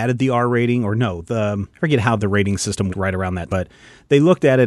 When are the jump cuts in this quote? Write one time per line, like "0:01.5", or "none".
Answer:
0:01.7
0:02.2
0:02.9
0:03.5